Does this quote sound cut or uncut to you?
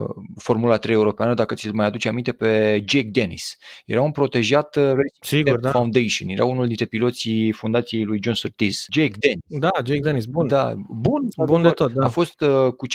uncut